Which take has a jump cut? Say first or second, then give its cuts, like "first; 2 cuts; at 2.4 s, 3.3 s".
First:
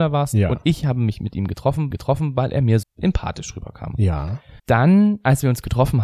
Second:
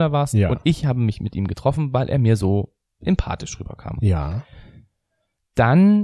first; 3 cuts; at 1.9 s, 2.8 s, 4.6 s